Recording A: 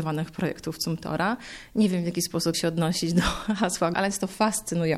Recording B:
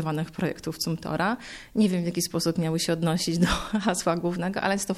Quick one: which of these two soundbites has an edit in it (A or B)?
A